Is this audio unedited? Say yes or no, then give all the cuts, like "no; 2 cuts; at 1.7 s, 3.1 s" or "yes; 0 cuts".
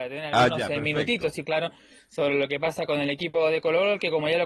no; 1 cut; at 1.4 s